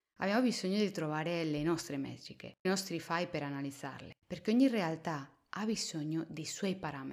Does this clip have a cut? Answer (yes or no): yes